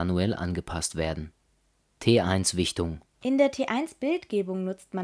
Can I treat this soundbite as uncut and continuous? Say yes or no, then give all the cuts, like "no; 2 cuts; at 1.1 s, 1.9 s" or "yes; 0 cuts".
no; 1 cut; at 3.1 s